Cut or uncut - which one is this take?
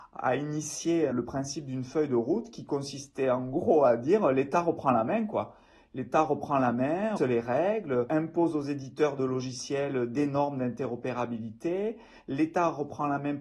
cut